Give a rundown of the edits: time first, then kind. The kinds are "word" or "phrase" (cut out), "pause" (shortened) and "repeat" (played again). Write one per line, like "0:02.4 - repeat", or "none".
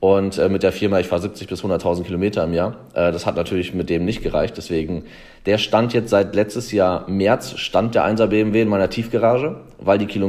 none